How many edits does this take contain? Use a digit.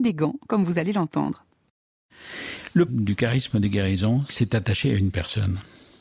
2